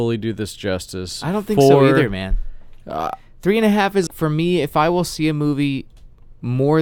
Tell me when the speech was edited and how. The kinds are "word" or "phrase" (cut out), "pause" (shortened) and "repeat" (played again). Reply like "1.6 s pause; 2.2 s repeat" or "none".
4.1 s word